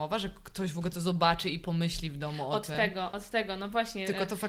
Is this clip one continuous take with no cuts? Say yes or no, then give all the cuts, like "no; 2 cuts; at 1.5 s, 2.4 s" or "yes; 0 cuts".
yes; 0 cuts